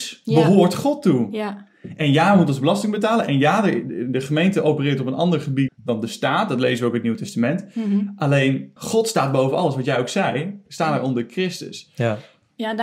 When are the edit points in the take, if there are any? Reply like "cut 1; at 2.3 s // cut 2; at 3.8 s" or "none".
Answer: cut 1; at 5.7 s // cut 2; at 8.8 s // cut 3; at 10.7 s

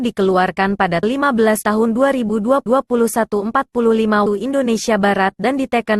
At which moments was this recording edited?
cut 1; at 1.0 s // cut 2; at 1.6 s // cut 3; at 2.7 s // cut 4; at 4.3 s

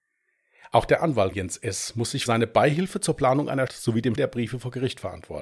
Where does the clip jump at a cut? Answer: cut 1; at 1.3 s // cut 2; at 2.3 s // cut 3; at 3.7 s // cut 4; at 4.2 s

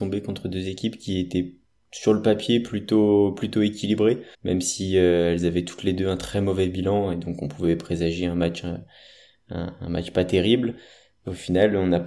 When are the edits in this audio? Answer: cut 1; at 1.6 s // cut 2; at 4.3 s

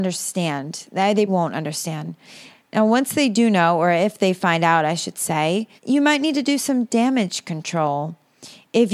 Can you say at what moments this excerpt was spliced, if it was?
cut 1; at 1.3 s // cut 2; at 5.8 s

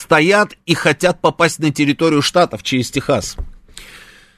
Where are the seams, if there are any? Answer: none

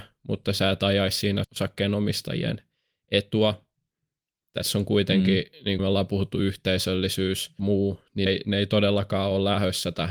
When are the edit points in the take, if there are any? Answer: cut 1; at 1.4 s // cut 2; at 5.8 s // cut 3; at 7.6 s // cut 4; at 8.3 s

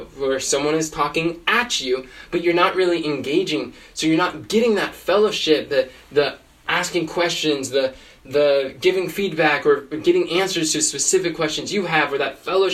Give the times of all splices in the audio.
none

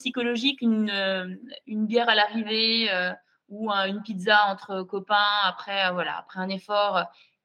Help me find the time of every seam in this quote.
none

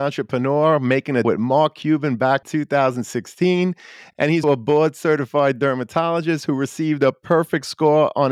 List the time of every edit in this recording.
cut 1; at 1.2 s // cut 2; at 2.4 s // cut 3; at 4.4 s

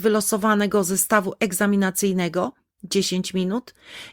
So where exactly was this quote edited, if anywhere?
none

